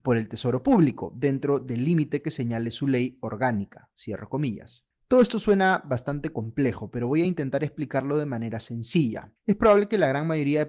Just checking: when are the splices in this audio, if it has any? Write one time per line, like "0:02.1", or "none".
none